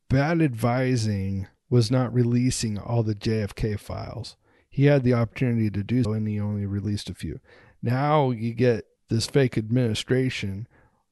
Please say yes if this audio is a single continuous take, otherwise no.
no